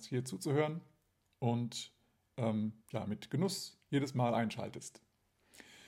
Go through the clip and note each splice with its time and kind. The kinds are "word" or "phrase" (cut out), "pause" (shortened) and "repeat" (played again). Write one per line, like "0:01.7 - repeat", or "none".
0:02.8 - pause